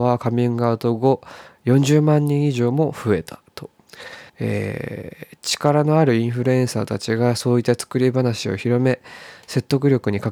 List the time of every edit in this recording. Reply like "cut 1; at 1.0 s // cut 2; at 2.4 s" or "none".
cut 1; at 4.3 s